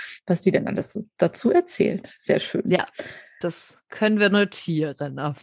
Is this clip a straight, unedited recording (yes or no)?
yes